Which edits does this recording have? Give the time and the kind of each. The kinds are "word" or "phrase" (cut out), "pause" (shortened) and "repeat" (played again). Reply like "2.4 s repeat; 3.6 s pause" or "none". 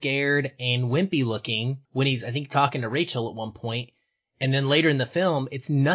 1.8 s pause